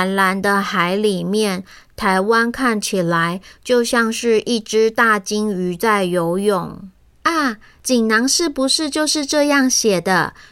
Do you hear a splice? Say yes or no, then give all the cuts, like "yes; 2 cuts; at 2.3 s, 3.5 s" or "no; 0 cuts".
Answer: no; 0 cuts